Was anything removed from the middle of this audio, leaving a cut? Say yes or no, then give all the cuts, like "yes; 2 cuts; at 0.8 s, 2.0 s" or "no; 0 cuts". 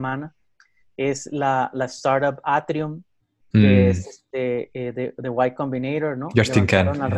no; 0 cuts